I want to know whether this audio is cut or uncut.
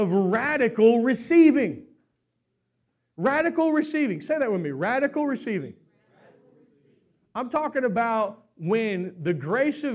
uncut